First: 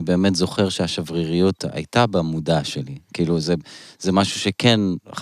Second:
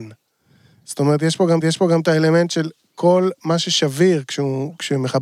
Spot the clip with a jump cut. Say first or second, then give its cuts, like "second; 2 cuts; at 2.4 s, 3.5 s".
second; 1 cut; at 1.6 s